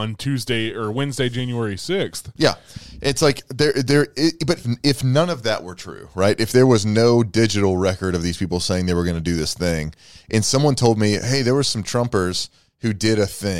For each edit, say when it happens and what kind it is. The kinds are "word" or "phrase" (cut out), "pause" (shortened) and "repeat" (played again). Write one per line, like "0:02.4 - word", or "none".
0:04.6 - word

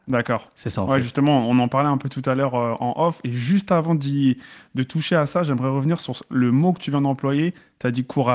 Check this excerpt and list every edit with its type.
none

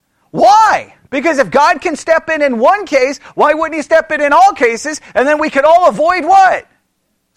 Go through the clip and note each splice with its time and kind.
0:01.1 - pause

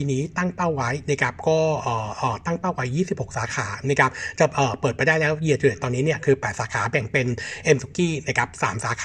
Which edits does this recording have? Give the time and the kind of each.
0:07.8 - word

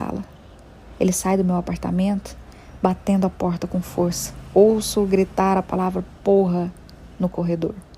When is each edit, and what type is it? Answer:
none

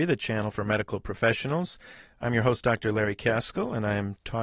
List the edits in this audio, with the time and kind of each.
none

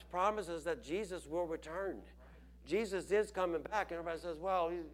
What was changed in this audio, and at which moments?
none

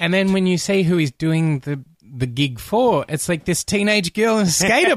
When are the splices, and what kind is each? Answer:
none

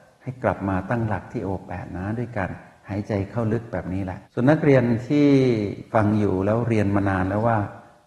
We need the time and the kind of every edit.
0:04.2 - pause

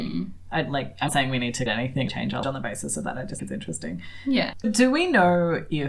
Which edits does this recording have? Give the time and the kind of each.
0:01.1 - word
0:01.7 - word
0:02.1 - phrase
0:02.4 - word
0:03.4 - word
0:04.6 - word

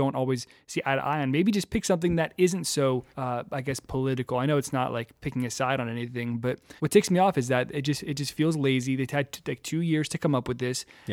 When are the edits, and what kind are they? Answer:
0:03.1 - pause
0:06.8 - pause

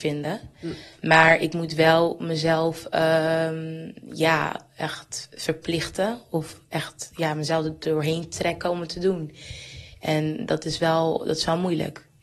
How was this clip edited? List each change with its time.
none

